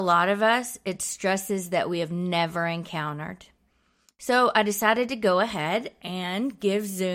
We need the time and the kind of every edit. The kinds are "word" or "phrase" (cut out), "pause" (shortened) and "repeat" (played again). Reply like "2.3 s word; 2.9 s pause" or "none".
none